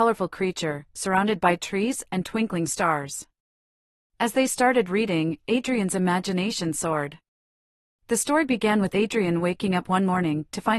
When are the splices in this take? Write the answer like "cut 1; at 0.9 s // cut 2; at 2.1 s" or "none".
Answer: none